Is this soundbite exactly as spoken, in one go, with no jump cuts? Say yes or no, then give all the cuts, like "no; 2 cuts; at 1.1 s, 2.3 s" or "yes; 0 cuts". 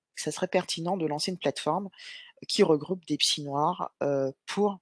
yes; 0 cuts